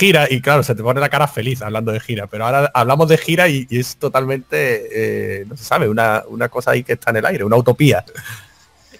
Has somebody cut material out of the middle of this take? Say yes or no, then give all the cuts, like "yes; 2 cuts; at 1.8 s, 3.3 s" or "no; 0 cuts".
no; 0 cuts